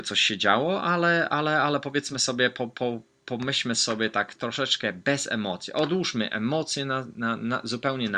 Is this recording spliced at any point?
no; 0 cuts

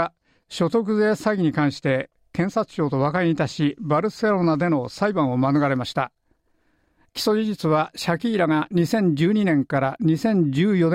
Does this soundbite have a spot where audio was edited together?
no; 0 cuts

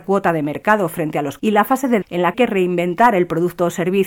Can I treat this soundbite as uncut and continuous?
no; 3 cuts; at 1.4 s, 2.0 s, 2.3 s

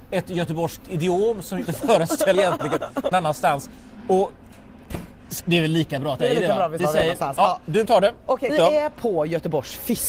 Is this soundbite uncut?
no; 8 cuts; at 1.7 s, 2.3 s, 3.1 s, 5.4 s, 6.2 s, 6.8 s, 7.9 s, 8.5 s

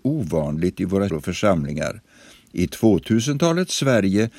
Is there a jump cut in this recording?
yes; 1 cut; at 1.1 s

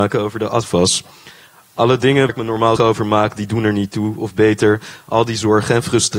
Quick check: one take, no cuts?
no; 2 cuts; at 2.3 s, 2.8 s

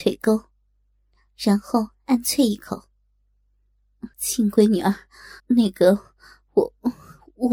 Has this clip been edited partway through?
yes; 2 cuts; at 4.1 s, 5.4 s

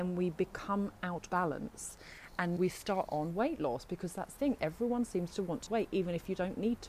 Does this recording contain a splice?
yes; 5 cuts; at 1.3 s, 2.6 s, 3.1 s, 4.4 s, 5.7 s

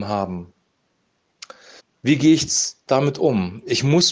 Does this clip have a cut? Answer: yes; 1 cut; at 1.8 s

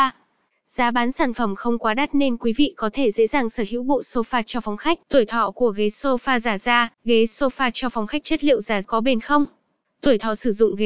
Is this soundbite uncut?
no; 4 cuts; at 5.0 s, 6.9 s, 8.2 s, 8.8 s

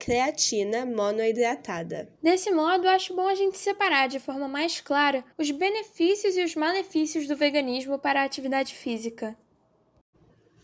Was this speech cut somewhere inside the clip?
yes; 2 cuts; at 2.2 s, 5.3 s

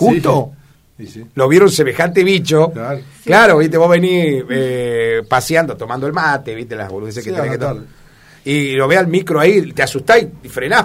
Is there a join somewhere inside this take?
no; 0 cuts

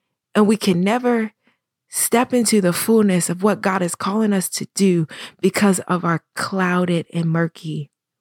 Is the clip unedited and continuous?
yes; 0 cuts

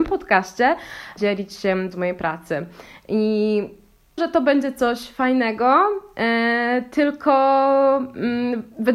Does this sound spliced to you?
yes; 3 cuts; at 1.2 s, 1.9 s, 4.2 s

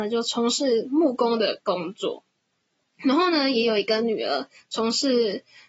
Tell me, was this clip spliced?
no; 0 cuts

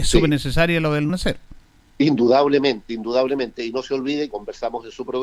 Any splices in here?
yes; 2 cuts; at 1.1 s, 4.3 s

